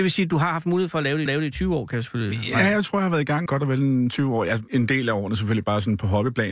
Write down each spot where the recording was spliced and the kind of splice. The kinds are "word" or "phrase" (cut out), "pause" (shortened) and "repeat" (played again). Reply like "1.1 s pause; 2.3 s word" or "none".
1.3 s repeat; 3.5 s word; 4.7 s word

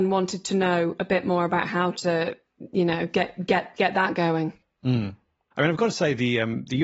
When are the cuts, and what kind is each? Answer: none

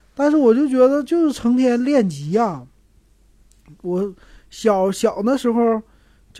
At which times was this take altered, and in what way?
none

